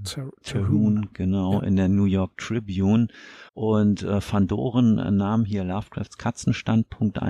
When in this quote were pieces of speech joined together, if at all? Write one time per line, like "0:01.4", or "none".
0:03.5